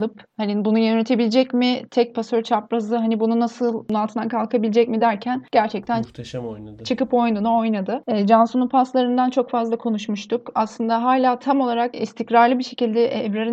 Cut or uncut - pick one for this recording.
uncut